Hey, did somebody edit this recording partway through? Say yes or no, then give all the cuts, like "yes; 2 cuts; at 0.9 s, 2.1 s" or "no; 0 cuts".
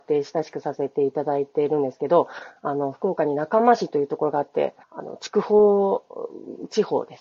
yes; 1 cut; at 4.8 s